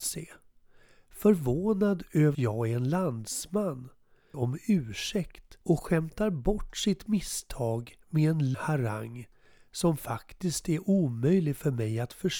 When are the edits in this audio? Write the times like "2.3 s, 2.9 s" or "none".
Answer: 2.3 s, 4.3 s, 5.6 s, 8.0 s, 8.5 s